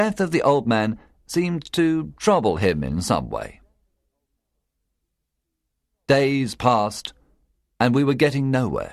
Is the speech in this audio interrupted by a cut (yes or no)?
no